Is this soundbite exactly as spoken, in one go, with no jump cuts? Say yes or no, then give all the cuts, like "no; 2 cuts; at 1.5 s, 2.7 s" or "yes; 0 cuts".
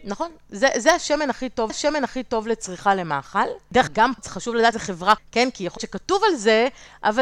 no; 6 cuts; at 1.7 s, 3.9 s, 4.2 s, 4.7 s, 5.2 s, 5.8 s